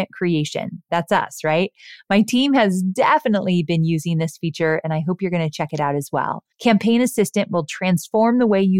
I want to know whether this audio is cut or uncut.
cut